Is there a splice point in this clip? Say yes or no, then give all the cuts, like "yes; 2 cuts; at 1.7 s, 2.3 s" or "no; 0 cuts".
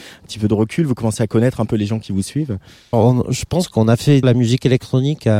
yes; 2 cuts; at 2.9 s, 4.2 s